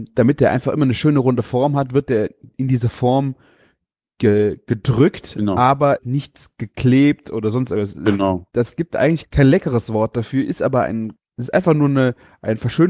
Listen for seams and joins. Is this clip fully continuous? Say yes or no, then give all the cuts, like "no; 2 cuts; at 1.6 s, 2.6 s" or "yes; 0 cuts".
no; 3 cuts; at 6.0 s, 9.2 s, 11.2 s